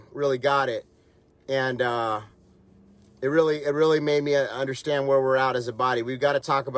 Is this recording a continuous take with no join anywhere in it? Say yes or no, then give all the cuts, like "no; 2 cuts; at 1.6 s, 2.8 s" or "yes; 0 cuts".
yes; 0 cuts